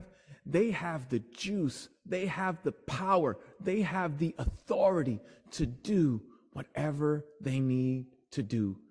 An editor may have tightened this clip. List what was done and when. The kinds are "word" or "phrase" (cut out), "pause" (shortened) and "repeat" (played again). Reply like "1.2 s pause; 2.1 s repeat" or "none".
none